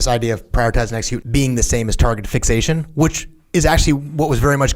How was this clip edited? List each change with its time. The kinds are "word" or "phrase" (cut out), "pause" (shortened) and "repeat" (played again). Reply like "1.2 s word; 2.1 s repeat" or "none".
1.2 s word